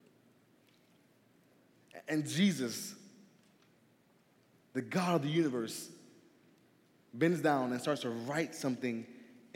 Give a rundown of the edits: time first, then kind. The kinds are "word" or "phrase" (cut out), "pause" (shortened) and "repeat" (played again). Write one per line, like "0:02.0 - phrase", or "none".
none